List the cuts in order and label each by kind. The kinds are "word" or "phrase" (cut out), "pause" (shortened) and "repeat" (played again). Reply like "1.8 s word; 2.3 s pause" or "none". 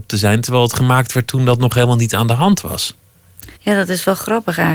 3.6 s pause